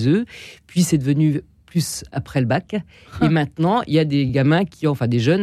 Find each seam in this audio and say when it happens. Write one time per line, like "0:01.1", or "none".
none